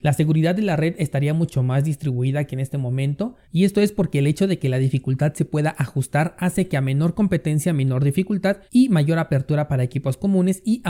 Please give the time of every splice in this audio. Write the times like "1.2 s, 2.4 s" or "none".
3.4 s, 8.7 s